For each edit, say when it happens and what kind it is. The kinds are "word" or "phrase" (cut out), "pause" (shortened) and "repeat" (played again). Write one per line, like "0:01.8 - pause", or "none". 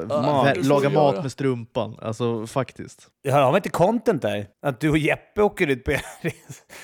0:03.1 - pause
0:04.5 - pause